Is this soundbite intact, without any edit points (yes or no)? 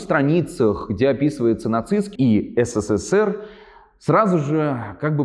no